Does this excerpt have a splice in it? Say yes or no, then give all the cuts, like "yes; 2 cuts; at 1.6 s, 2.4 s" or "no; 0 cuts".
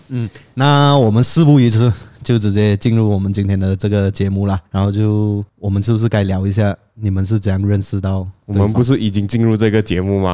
yes; 2 cuts; at 4.7 s, 5.5 s